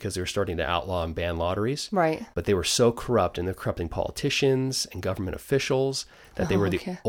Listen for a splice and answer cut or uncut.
uncut